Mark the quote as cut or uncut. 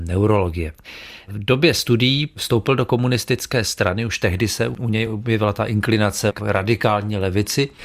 uncut